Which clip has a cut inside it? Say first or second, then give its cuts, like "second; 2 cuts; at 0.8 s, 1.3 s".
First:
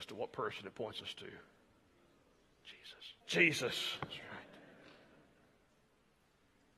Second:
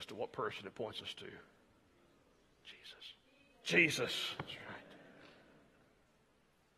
first; 1 cut; at 3.2 s